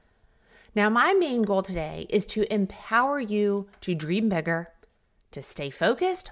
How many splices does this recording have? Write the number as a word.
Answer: zero